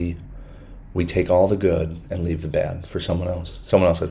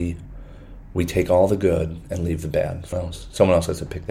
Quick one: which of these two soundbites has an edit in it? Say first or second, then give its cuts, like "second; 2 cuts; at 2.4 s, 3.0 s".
second; 1 cut; at 2.9 s